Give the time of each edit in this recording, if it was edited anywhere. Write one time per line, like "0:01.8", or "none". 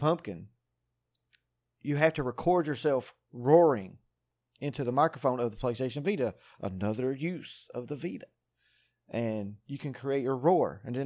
none